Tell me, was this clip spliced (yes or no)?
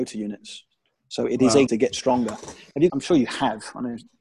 yes